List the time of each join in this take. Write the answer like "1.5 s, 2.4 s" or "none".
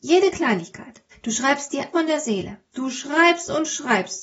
1.1 s, 1.9 s